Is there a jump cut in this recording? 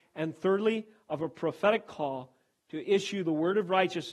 no; 0 cuts

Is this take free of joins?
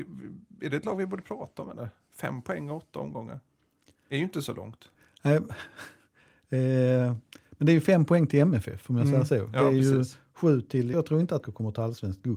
no; 2 cuts; at 10.9 s, 11.4 s

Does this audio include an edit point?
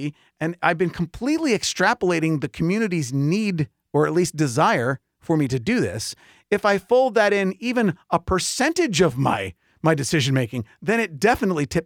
no; 0 cuts

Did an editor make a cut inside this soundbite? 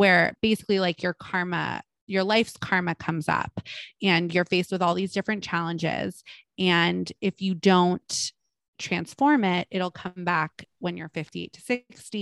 no; 0 cuts

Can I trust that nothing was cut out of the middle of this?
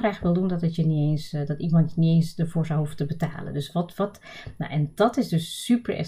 yes; 0 cuts

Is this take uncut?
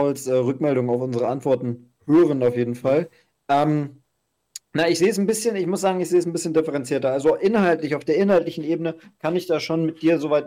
yes; 0 cuts

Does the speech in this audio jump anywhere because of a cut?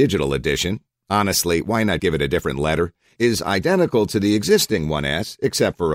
yes; 1 cut; at 2.0 s

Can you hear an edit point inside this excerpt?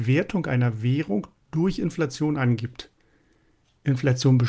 no; 0 cuts

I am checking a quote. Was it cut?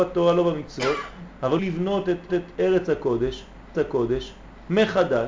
yes; 3 cuts; at 1.6 s, 2.3 s, 3.7 s

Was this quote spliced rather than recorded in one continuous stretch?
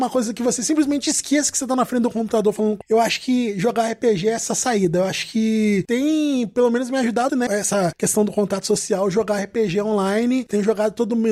yes; 2 cuts; at 2.8 s, 7.3 s

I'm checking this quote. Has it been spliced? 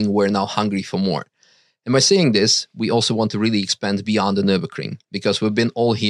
no; 0 cuts

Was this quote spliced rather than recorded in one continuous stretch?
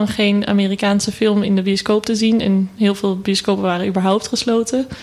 no; 0 cuts

